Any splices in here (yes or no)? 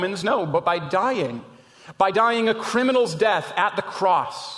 no